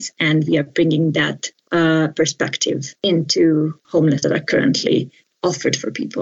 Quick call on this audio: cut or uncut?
cut